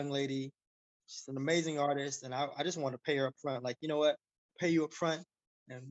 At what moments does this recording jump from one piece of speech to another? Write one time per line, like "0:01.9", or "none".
none